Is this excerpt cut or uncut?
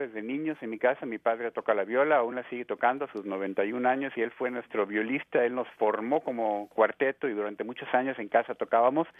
uncut